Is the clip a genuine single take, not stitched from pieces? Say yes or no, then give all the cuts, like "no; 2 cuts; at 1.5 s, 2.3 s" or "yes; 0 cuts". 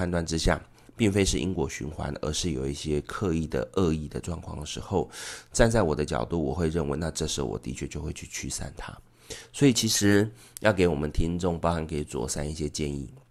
yes; 0 cuts